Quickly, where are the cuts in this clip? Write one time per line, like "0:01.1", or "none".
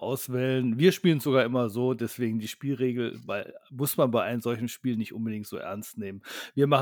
none